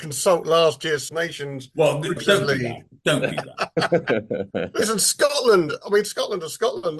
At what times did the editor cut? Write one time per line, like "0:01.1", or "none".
0:01.1
0:02.2
0:05.8